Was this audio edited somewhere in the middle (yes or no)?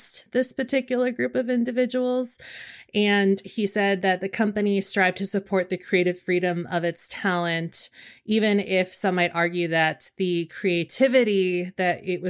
no